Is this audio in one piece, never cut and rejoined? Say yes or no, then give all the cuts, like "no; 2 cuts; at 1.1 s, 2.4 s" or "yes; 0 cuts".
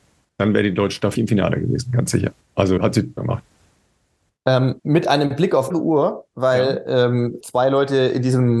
no; 6 cuts; at 1.2 s, 2.8 s, 3.2 s, 4.8 s, 5.7 s, 7.4 s